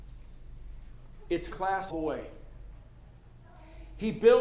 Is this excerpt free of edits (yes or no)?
no